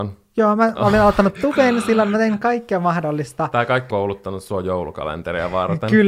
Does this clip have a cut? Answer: yes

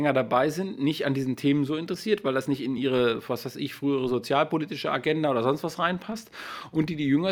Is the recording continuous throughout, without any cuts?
yes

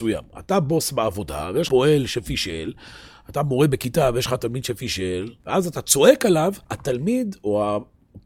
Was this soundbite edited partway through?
yes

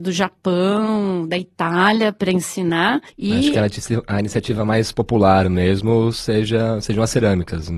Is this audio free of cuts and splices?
no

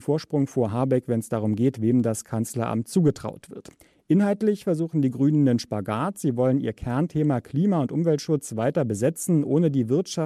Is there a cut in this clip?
no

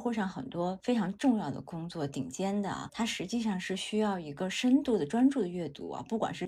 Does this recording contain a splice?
no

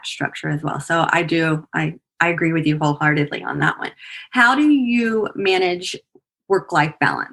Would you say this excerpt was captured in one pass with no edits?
yes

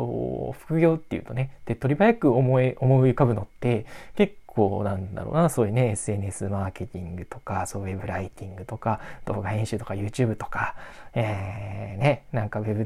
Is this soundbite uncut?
yes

